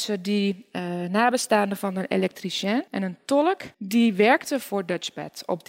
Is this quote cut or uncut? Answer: cut